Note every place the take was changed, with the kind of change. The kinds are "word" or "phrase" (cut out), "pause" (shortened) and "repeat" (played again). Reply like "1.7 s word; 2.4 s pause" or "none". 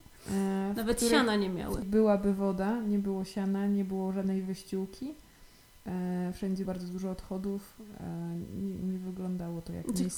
1.8 s word; 6.6 s word